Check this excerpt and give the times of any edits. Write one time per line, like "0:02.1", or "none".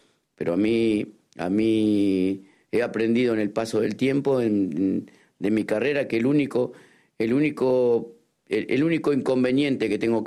none